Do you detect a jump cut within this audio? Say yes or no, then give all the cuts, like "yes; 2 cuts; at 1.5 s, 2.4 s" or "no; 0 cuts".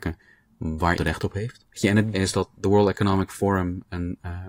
yes; 3 cuts; at 1.0 s, 1.7 s, 2.1 s